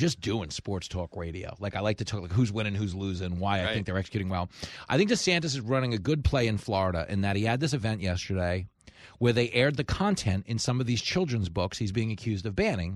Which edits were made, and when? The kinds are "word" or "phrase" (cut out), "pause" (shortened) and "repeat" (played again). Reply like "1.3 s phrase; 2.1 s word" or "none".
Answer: none